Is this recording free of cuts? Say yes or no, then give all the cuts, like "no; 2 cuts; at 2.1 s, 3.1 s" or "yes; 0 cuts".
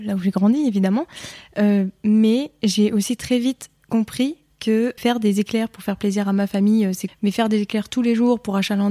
no; 2 cuts; at 5.0 s, 7.1 s